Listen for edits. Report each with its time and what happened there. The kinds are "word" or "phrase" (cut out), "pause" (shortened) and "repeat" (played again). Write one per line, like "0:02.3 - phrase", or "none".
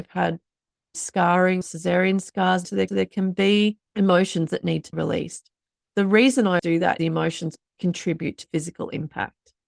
0:01.6 - word
0:02.9 - repeat
0:03.8 - pause
0:04.9 - word
0:06.6 - word
0:07.0 - phrase
0:07.7 - word
0:08.4 - word